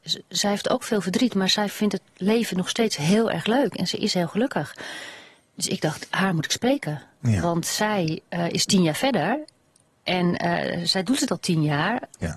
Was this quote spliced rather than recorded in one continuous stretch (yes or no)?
no